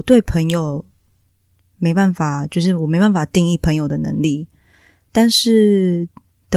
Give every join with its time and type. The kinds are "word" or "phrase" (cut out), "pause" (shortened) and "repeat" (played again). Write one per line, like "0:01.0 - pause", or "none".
none